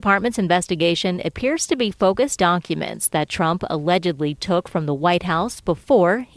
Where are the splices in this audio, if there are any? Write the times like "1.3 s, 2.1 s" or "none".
2.4 s